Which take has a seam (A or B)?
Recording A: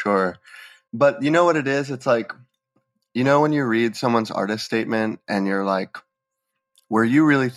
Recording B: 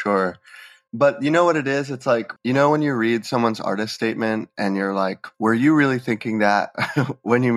B